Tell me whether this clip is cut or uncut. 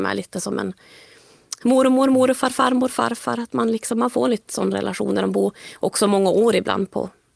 uncut